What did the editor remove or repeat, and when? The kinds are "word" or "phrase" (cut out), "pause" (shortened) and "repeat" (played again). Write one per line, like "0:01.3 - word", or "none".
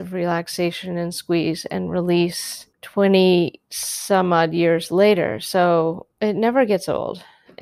0:02.7 - pause